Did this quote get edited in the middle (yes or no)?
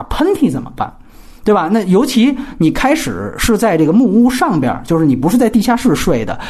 no